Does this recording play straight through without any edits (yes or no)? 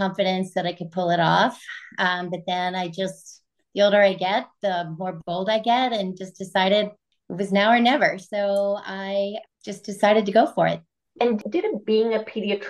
yes